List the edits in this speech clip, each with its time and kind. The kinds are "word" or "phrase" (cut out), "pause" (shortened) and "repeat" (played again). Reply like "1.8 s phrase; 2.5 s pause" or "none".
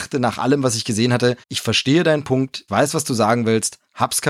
1.4 s pause; 2.7 s word